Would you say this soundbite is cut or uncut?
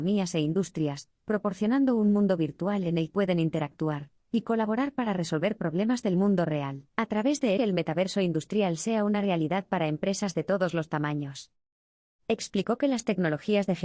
cut